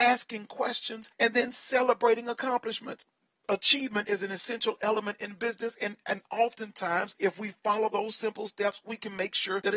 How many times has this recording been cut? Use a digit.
0